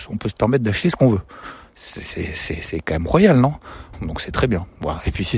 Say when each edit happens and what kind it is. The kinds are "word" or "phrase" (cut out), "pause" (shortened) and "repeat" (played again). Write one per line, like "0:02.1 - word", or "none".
0:03.9 - phrase